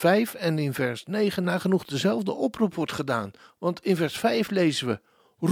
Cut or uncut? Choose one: uncut